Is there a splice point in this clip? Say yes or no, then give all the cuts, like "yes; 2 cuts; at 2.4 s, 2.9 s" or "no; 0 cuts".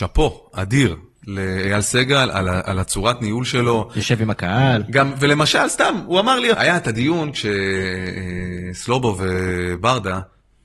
yes; 1 cut; at 6.5 s